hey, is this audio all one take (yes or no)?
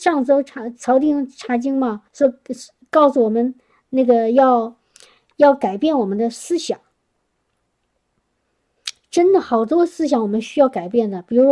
no